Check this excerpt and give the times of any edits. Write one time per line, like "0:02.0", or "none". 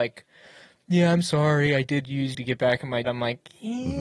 0:02.3
0:03.0